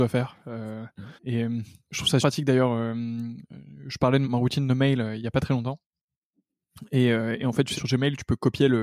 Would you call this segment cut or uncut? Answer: cut